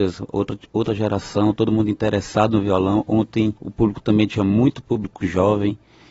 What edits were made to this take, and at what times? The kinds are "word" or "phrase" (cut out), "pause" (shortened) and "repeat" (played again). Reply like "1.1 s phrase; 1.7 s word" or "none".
3.6 s pause